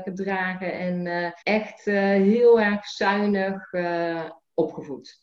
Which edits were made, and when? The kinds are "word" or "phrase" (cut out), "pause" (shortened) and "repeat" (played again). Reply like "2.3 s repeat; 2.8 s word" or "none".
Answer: 1.4 s pause